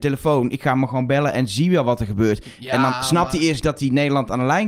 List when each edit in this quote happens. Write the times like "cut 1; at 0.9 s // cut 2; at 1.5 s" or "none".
cut 1; at 3.6 s